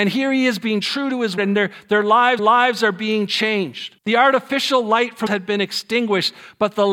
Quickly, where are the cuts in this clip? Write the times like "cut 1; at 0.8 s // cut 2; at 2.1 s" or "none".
cut 1; at 1.4 s // cut 2; at 2.4 s // cut 3; at 4.0 s // cut 4; at 5.3 s